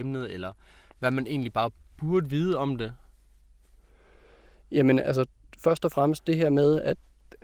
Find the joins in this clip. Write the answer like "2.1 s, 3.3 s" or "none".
none